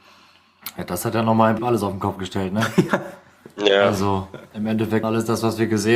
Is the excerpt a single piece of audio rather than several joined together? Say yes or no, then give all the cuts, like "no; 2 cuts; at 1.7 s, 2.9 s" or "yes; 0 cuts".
no; 2 cuts; at 1.6 s, 5.0 s